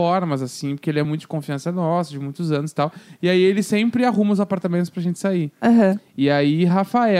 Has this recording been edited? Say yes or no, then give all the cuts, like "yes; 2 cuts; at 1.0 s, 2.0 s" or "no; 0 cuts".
no; 0 cuts